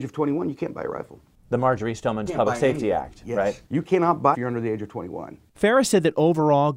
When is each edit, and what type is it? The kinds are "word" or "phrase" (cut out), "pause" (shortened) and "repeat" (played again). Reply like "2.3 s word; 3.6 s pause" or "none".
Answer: 1.3 s pause; 2.3 s word; 3.7 s pause; 4.3 s phrase